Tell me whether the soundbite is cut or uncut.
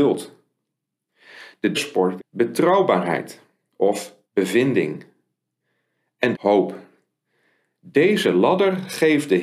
cut